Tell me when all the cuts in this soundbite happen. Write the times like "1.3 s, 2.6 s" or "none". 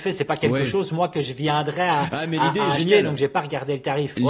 none